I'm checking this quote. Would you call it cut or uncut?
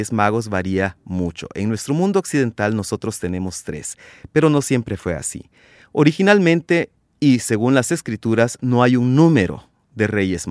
uncut